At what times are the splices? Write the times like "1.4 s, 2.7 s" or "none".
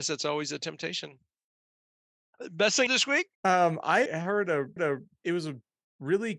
2.9 s, 3.4 s, 4.1 s, 4.8 s